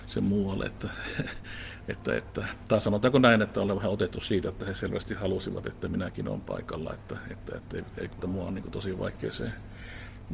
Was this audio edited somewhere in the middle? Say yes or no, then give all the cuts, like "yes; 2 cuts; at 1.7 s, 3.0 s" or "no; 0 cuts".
yes; 1 cut; at 8.2 s